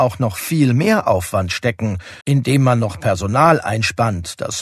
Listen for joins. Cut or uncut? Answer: cut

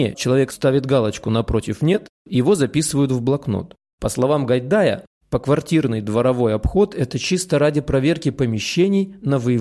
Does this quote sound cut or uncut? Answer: uncut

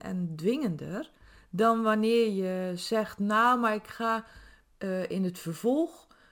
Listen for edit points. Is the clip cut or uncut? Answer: uncut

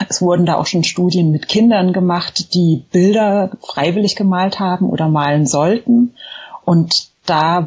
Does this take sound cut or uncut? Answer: uncut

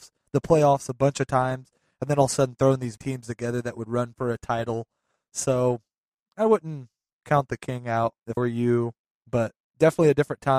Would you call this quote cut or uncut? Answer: cut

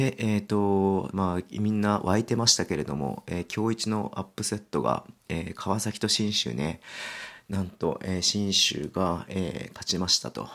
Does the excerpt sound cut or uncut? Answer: cut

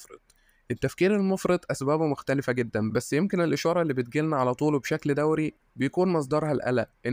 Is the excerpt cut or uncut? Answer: uncut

